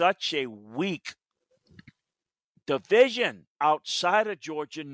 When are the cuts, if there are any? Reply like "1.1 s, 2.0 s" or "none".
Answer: 3.5 s